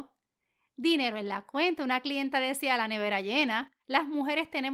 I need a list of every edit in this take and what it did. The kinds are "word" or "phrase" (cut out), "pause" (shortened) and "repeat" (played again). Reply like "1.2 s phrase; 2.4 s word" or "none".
3.8 s pause